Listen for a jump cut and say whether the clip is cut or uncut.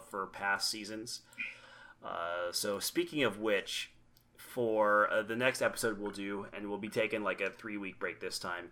uncut